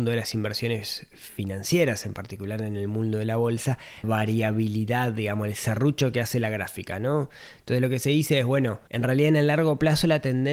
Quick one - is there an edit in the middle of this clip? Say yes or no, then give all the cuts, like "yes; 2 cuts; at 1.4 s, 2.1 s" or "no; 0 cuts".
yes; 2 cuts; at 4.0 s, 8.9 s